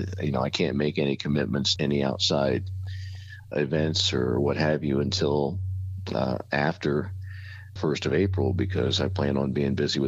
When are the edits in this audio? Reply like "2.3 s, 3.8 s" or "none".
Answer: 1.8 s, 3.5 s, 7.8 s